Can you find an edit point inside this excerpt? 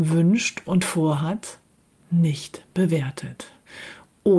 no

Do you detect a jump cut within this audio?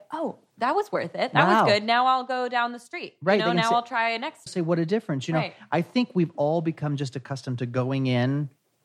yes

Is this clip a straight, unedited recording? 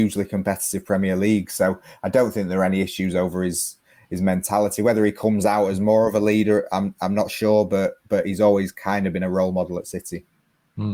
yes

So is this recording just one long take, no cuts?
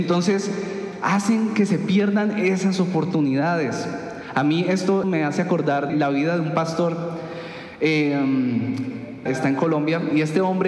no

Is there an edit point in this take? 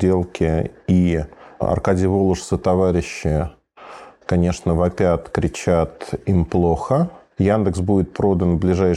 no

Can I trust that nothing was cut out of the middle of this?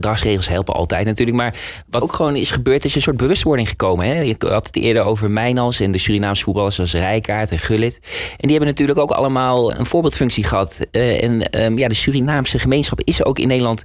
no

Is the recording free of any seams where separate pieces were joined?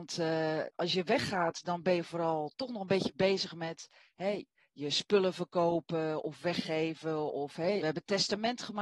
no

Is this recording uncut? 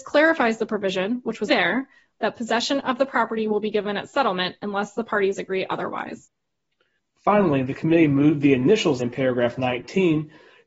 no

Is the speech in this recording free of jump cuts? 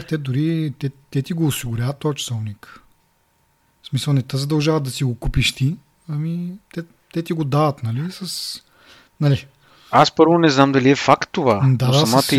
yes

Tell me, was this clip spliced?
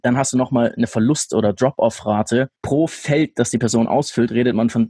yes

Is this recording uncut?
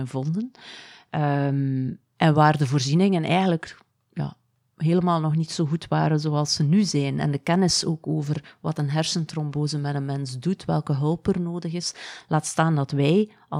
yes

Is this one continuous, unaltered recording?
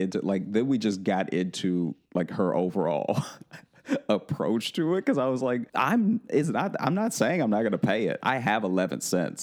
no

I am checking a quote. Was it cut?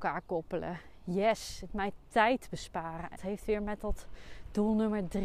yes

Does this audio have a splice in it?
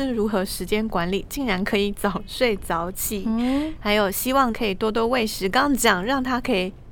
yes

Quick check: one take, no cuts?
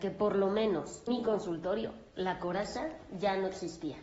no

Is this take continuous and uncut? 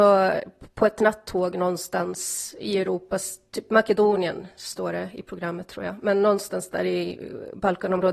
yes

